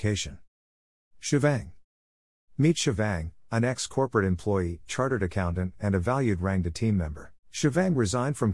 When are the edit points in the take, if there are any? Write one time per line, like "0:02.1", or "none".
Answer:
0:07.4